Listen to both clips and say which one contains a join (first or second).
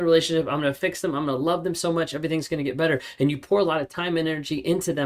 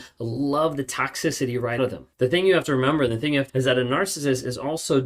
second